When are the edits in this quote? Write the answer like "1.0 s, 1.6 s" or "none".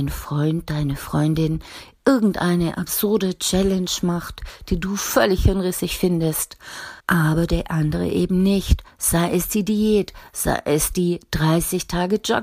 7.0 s